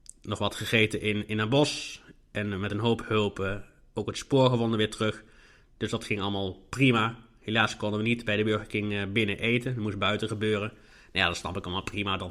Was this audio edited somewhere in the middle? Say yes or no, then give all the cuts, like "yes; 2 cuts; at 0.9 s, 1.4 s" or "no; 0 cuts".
no; 0 cuts